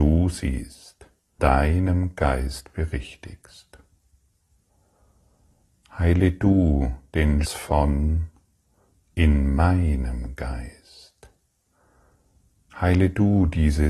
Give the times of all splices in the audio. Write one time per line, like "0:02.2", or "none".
0:01.4
0:07.4